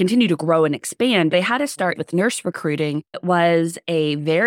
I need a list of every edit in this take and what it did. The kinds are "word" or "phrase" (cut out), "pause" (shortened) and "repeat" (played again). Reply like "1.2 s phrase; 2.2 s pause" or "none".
1.3 s word; 2.0 s word; 3.1 s word